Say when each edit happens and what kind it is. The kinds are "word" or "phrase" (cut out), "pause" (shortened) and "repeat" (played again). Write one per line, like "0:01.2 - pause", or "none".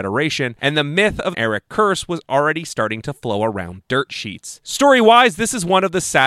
0:01.3 - phrase
0:03.8 - word